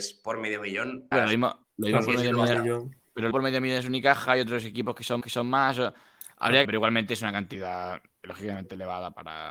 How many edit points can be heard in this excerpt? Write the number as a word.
four